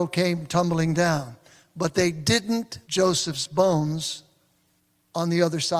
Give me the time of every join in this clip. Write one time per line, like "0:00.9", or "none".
0:02.8